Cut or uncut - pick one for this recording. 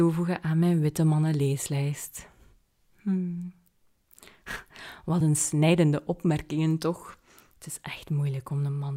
uncut